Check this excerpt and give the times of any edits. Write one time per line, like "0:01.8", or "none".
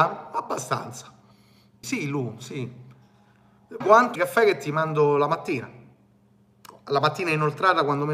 0:01.8
0:03.8
0:04.2